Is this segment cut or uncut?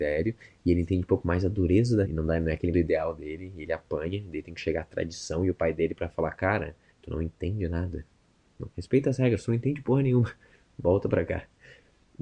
cut